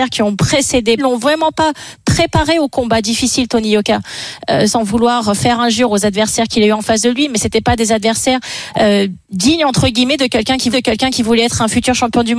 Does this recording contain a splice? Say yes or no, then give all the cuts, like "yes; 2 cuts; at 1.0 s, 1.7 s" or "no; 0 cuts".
yes; 4 cuts; at 1.0 s, 4.7 s, 9.2 s, 10.7 s